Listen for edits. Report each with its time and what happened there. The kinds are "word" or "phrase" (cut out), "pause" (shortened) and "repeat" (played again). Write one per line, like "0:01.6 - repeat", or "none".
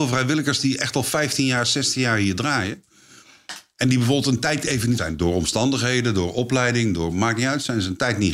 0:05.0 - word